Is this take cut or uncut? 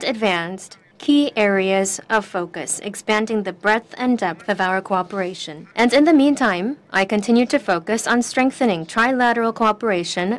cut